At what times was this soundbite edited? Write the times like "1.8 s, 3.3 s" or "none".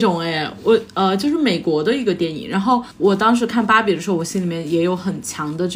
2.9 s